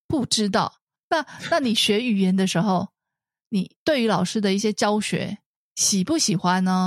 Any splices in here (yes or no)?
no